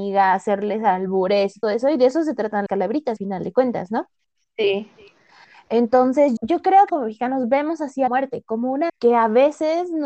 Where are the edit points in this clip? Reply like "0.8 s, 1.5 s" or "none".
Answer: 1.6 s, 2.7 s, 3.2 s, 6.4 s, 6.9 s, 8.1 s, 8.9 s